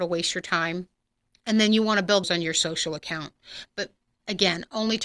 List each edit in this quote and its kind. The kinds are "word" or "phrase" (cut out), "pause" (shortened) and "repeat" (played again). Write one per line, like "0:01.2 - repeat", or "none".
0:01.2 - pause
0:02.2 - phrase